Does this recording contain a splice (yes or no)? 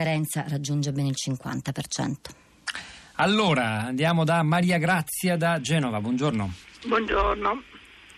no